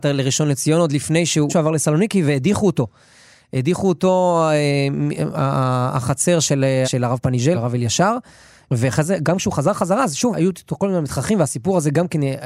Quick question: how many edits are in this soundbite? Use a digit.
4